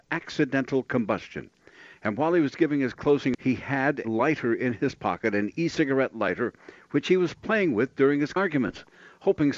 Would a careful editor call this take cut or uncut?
cut